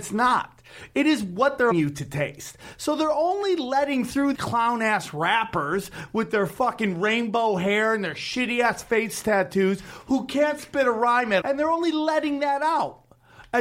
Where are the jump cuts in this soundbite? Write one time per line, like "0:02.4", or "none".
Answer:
0:01.7
0:04.3
0:11.4